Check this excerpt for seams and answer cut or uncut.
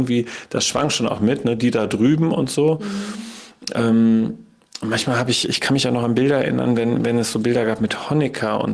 uncut